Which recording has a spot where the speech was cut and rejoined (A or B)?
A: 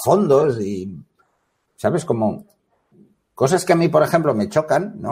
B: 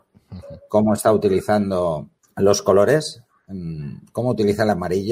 B